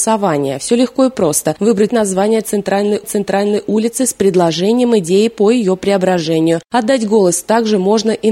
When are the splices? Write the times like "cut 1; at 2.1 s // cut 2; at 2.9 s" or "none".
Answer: cut 1; at 1.9 s // cut 2; at 3.0 s // cut 3; at 6.7 s